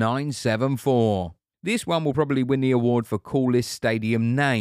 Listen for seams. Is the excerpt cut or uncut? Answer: uncut